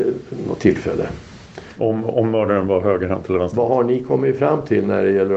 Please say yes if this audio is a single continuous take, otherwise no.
yes